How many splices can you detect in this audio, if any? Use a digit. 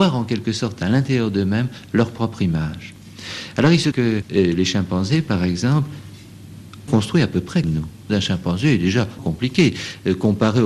6